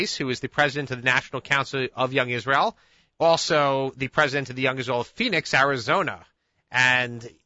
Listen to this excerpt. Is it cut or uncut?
uncut